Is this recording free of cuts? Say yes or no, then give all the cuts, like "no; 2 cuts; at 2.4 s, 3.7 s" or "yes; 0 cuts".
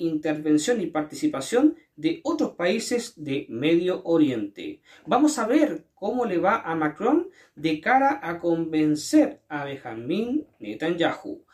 yes; 0 cuts